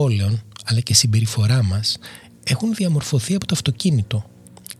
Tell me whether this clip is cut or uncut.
uncut